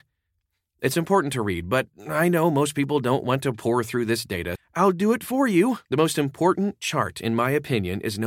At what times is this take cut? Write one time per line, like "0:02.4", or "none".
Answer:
0:04.5
0:05.8